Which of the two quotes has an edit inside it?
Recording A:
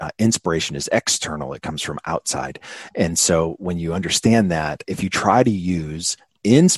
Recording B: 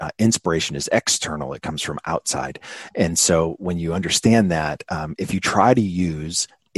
A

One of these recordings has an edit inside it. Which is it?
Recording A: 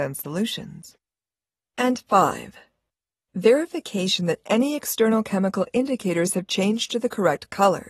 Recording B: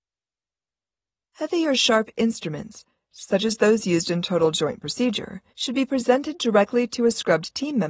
B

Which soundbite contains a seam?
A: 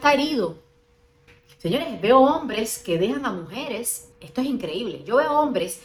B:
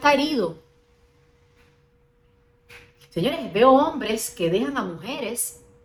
A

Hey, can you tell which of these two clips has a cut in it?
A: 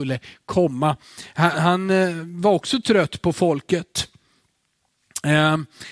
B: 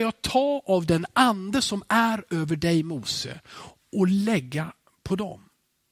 A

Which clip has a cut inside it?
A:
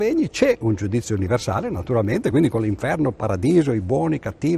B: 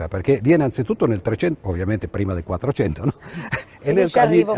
B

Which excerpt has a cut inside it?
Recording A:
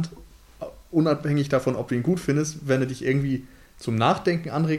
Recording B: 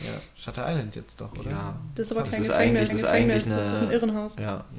B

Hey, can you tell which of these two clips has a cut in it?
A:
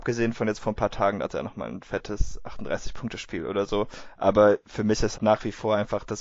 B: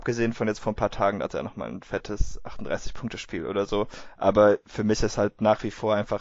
A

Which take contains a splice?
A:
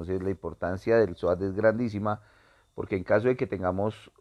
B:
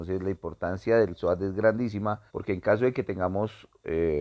B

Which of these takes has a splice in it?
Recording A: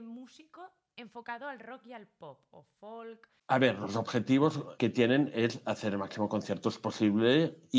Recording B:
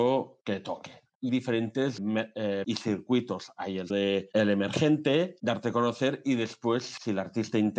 B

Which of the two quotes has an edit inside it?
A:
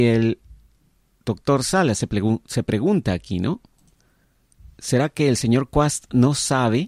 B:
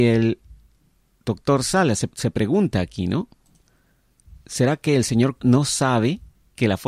B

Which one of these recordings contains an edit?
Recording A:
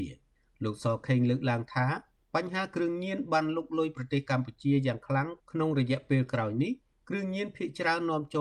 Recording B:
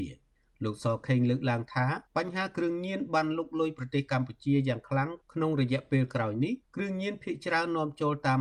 B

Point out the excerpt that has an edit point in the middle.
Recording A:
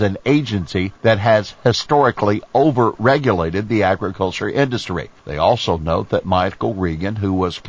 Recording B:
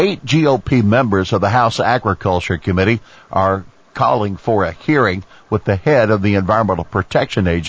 A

